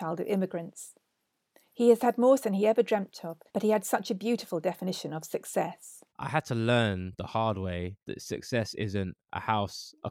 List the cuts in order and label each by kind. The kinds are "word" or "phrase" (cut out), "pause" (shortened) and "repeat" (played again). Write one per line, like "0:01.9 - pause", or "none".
0:02.4 - word
0:03.5 - pause
0:06.1 - pause
0:08.0 - pause